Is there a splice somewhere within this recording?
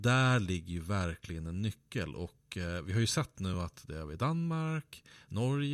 no; 0 cuts

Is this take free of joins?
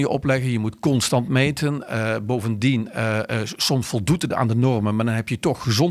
yes; 0 cuts

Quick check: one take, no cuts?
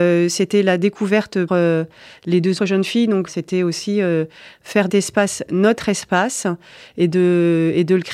no; 4 cuts; at 1.5 s, 2.6 s, 3.3 s, 4.9 s

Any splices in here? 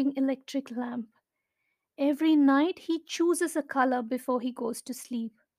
no; 0 cuts

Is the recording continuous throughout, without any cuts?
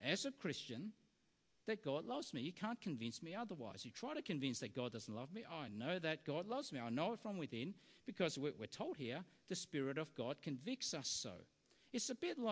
yes; 0 cuts

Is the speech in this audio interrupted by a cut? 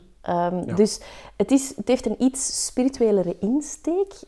no; 0 cuts

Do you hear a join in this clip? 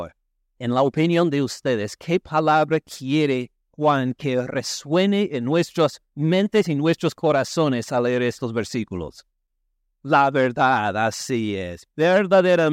no; 0 cuts

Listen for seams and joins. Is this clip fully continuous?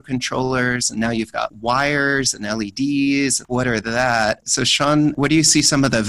yes; 0 cuts

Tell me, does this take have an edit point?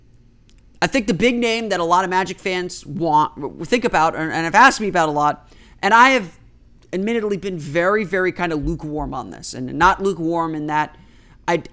no; 0 cuts

